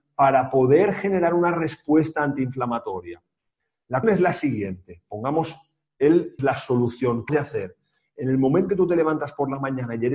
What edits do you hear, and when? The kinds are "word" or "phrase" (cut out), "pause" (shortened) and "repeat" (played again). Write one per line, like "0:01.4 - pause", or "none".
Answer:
0:04.0 - word
0:06.4 - word
0:07.3 - word
0:08.7 - word